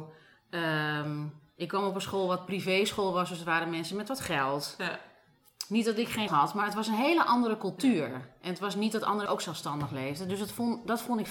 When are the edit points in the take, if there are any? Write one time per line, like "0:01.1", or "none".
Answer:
0:06.3
0:09.3